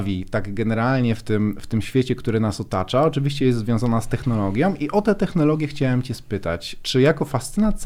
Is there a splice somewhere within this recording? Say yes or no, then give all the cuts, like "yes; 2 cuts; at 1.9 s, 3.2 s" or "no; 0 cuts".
no; 0 cuts